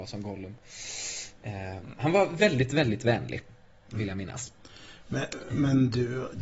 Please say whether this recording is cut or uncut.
uncut